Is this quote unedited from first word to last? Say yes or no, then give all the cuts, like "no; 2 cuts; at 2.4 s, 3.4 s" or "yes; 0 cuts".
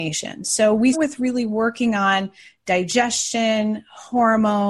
no; 1 cut; at 0.9 s